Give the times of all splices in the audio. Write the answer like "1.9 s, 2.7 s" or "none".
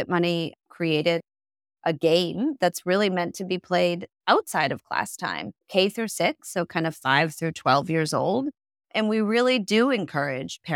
5.6 s